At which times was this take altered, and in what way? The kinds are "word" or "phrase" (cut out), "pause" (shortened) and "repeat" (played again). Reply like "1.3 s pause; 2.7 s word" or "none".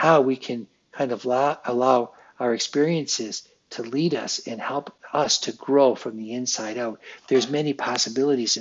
none